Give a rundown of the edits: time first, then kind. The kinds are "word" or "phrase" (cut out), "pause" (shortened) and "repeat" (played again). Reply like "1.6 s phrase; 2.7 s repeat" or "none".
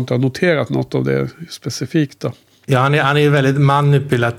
none